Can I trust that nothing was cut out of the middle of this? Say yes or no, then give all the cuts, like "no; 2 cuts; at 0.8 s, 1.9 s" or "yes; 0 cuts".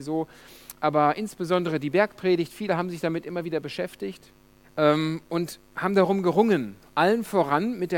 no; 1 cut; at 4.6 s